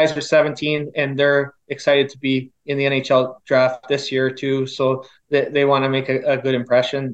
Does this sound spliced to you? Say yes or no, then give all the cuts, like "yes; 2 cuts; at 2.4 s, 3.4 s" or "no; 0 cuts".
no; 0 cuts